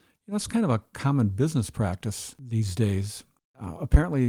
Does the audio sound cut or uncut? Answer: uncut